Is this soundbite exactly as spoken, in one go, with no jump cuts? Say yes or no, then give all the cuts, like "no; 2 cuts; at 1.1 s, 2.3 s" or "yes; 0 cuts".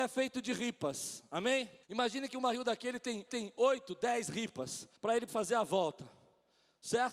no; 4 cuts; at 1.8 s, 3.3 s, 5.0 s, 5.3 s